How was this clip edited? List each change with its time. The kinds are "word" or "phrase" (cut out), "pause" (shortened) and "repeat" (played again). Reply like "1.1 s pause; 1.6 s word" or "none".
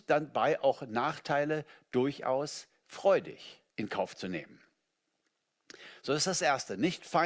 3.7 s pause